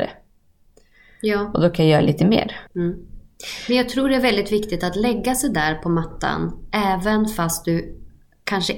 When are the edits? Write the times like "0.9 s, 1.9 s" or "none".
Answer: 2.7 s